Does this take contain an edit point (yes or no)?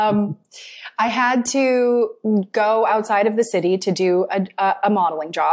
no